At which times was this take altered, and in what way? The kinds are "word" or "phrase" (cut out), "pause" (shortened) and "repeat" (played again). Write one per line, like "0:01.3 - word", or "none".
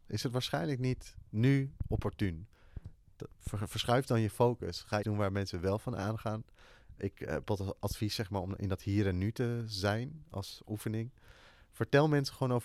0:05.0 - word